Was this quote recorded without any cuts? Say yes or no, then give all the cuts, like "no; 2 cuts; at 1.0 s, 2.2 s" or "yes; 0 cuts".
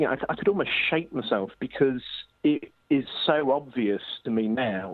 yes; 0 cuts